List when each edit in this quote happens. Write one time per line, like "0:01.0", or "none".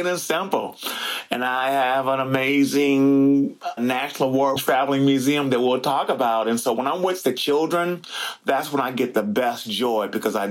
0:03.8
0:04.6

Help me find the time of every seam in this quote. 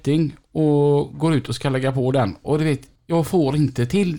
0:03.0

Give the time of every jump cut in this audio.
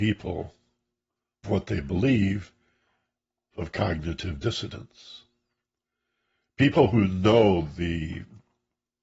0:01.4
0:03.5

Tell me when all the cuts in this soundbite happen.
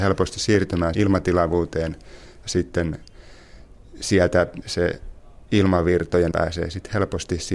0:00.9
0:02.4
0:04.6
0:06.3

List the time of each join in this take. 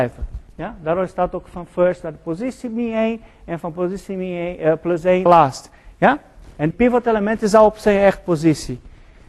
0:05.3
0:06.7

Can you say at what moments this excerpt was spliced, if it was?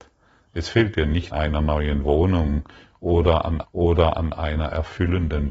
0:01.3
0:03.6

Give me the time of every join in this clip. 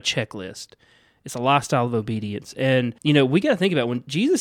0:03.0

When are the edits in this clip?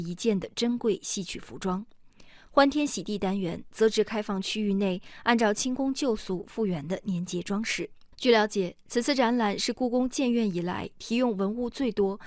0:08.1

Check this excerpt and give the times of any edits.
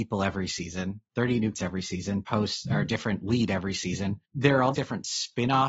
0:01.5
0:02.3
0:04.2
0:04.7

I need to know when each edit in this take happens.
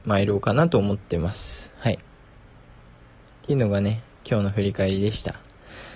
none

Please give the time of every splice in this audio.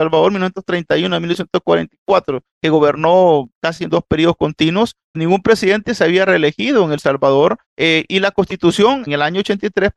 0:02.5
0:05.1
0:07.6
0:09.1

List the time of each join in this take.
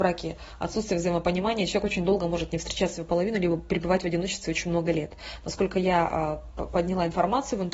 none

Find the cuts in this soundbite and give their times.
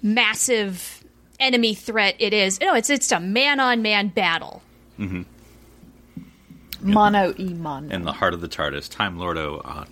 none

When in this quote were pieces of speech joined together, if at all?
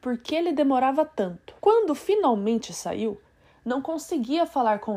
0:01.6

